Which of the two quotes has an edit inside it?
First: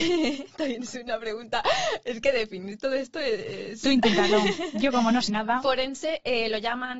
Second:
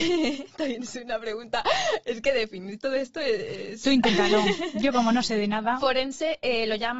first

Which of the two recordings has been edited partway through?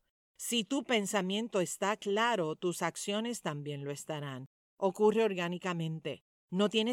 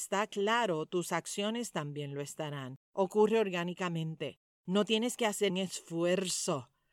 second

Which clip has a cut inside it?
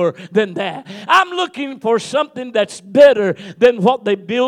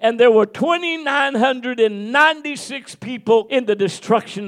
second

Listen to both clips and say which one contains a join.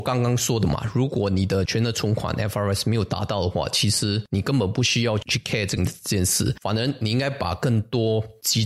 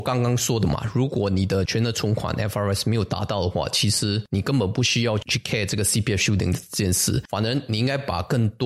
first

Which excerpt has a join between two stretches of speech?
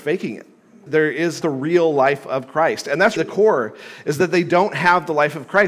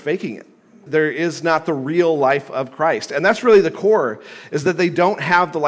first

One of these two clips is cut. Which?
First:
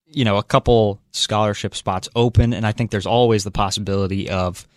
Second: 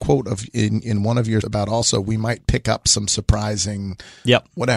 second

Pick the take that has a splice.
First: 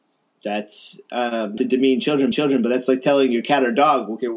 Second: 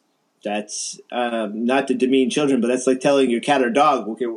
first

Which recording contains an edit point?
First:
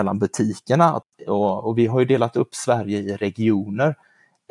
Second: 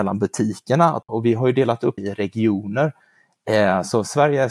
second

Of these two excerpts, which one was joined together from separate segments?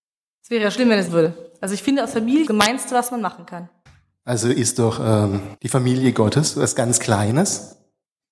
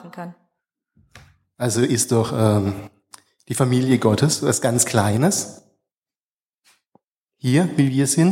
first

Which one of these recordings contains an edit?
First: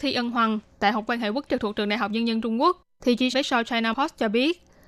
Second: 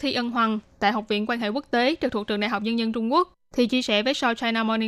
first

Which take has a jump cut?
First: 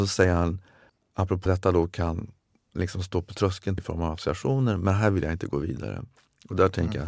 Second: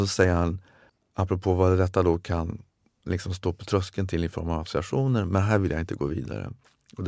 first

